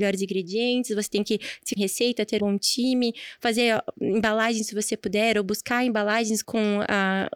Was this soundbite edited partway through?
yes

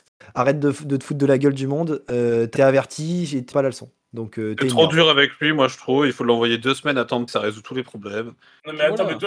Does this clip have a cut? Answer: yes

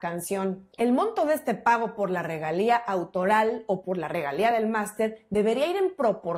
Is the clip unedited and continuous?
yes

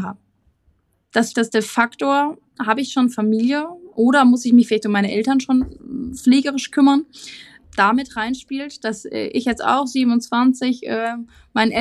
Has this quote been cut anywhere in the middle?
yes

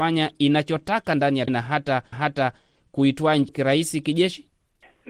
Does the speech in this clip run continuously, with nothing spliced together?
no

